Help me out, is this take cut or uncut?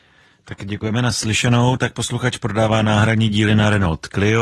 uncut